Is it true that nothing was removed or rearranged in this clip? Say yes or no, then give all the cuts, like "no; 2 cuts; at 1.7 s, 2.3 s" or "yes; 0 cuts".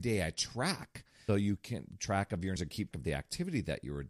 no; 4 cuts; at 1.3 s, 2.0 s, 2.6 s, 2.9 s